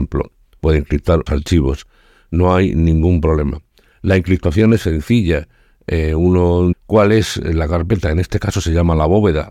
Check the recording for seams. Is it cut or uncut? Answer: cut